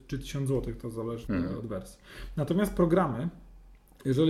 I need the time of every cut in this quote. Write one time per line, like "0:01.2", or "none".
0:01.3